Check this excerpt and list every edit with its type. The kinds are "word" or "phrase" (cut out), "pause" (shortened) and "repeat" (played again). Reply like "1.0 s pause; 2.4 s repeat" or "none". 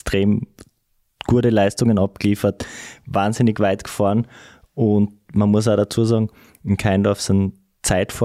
none